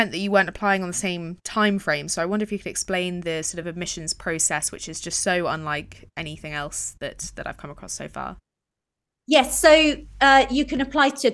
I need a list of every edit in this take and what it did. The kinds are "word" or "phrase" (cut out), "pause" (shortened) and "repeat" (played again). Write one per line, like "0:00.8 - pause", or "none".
none

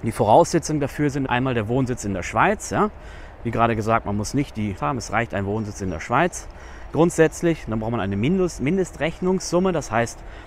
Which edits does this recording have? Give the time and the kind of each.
0:01.3 - word
0:04.8 - word

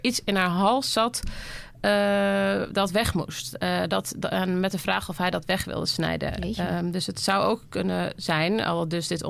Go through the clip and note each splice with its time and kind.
none

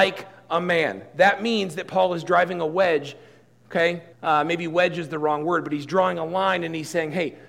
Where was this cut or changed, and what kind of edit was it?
0:04.1 - pause

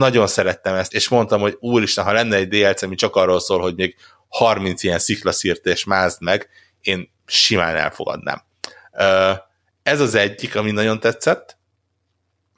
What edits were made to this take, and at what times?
0:00.9 - word

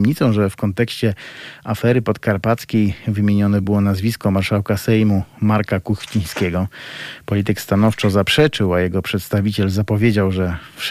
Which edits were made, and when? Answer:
none

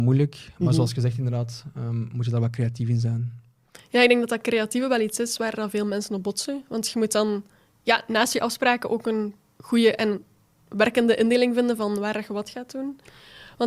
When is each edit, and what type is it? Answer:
none

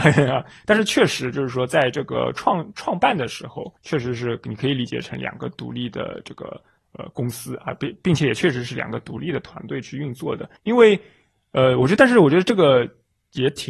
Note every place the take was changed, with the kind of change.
0:03.8 - pause
0:10.6 - pause

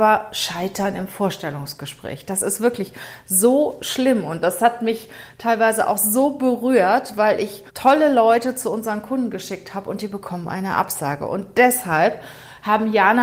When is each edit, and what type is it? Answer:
0:07.7 - pause

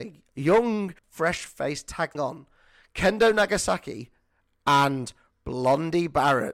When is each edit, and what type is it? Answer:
0:01.0 - pause
0:02.1 - phrase

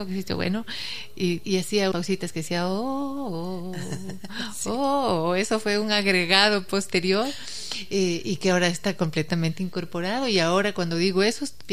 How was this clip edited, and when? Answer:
0:01.4 - word
0:01.9 - word

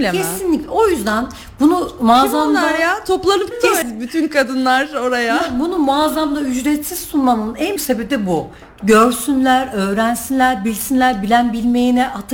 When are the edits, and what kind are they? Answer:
0:03.5 - word
0:03.8 - word
0:07.8 - word

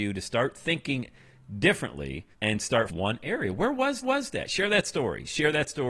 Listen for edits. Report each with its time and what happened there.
0:02.3 - pause
0:02.9 - phrase
0:04.0 - repeat

